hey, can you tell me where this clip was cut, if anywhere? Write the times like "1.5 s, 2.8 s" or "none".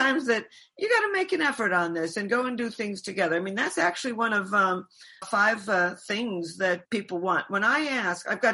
5.2 s, 6.8 s